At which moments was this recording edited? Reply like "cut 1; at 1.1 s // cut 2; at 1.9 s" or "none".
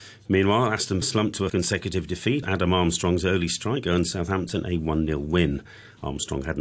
cut 1; at 1.0 s // cut 2; at 1.5 s // cut 3; at 2.4 s